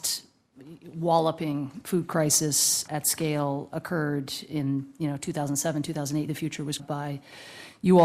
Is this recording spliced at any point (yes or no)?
yes